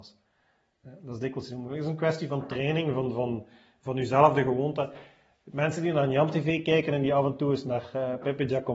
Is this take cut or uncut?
uncut